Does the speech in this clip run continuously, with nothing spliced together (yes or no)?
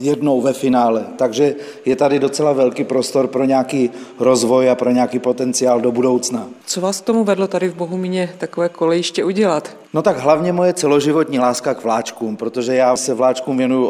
yes